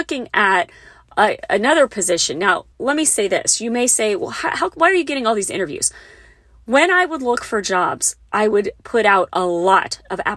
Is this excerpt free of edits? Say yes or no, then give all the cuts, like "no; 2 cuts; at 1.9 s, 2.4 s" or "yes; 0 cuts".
no; 1 cut; at 2.7 s